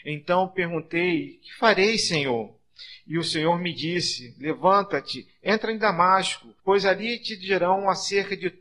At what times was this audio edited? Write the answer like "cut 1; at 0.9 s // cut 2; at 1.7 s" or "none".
cut 1; at 6.6 s